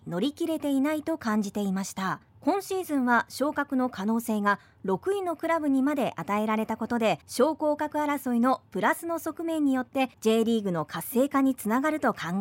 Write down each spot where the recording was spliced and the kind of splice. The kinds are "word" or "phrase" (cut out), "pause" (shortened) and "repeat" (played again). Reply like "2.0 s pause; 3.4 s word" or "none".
2.3 s pause; 7.2 s pause; 10.1 s pause